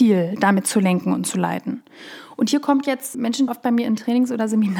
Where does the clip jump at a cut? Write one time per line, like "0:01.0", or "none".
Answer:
0:03.1
0:03.5